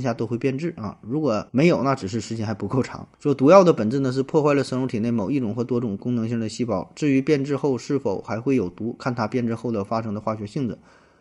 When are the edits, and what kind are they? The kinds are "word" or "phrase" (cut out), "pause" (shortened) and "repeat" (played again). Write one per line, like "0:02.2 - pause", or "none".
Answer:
0:01.5 - pause
0:03.1 - pause